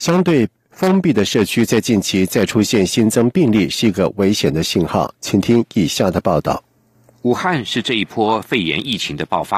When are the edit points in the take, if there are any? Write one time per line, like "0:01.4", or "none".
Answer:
none